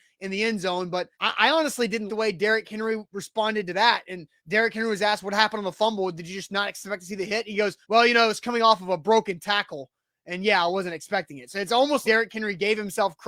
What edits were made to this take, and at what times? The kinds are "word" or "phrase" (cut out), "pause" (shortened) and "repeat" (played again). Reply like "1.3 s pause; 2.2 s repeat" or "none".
1.1 s pause; 2.1 s word; 4.4 s pause; 7.8 s pause; 12.0 s word